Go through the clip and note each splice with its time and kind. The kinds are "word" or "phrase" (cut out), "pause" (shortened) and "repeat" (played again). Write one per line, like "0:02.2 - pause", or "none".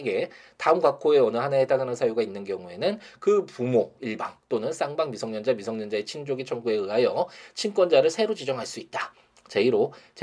none